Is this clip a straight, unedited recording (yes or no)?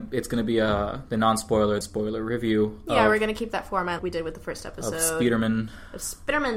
no